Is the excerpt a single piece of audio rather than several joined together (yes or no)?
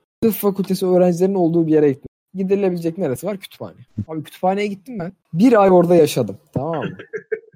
yes